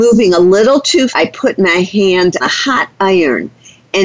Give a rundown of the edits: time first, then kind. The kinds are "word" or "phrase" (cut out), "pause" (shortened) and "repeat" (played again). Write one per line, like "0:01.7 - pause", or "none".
0:01.1 - word
0:02.4 - word